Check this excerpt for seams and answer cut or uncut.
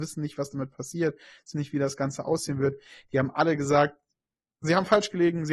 cut